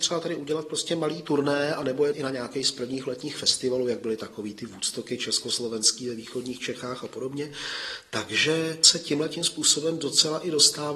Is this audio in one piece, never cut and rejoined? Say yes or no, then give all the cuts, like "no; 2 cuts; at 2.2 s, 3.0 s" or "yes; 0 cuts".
no; 1 cut; at 2.1 s